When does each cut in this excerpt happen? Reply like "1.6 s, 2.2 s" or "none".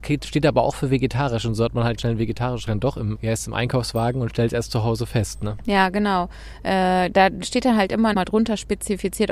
2.0 s, 2.7 s, 3.1 s, 8.1 s